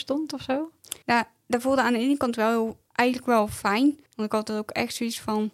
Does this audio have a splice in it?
yes; 3 cuts; at 1.0 s, 2.9 s, 4.1 s

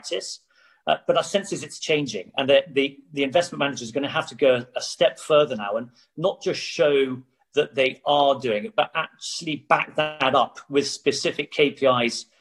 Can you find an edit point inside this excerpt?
no; 0 cuts

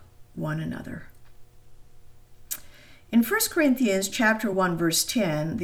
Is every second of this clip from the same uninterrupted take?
yes; 0 cuts

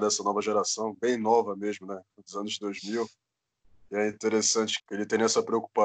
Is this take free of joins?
no; 1 cut; at 4.8 s

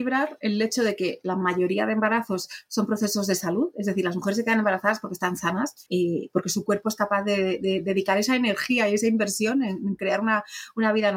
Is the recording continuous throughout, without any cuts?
no; 1 cut; at 5.9 s

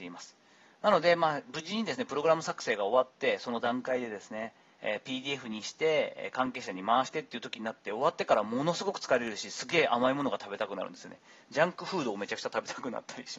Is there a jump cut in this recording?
no; 0 cuts

